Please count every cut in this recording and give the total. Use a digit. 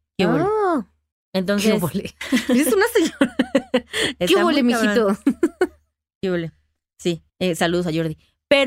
2